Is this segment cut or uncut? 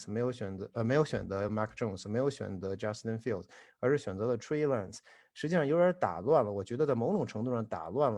uncut